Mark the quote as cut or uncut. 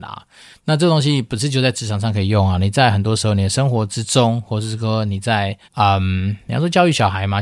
cut